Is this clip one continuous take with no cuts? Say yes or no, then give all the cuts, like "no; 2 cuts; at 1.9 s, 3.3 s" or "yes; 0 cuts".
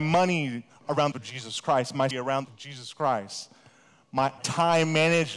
no; 4 cuts; at 1.1 s, 2.1 s, 2.4 s, 4.4 s